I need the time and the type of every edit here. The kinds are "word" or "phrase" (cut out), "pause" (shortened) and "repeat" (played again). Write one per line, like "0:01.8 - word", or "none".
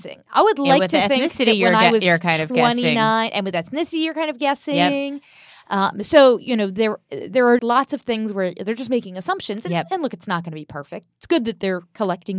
0:07.6 - word